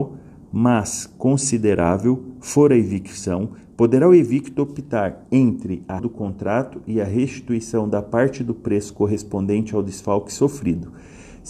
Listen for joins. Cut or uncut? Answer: cut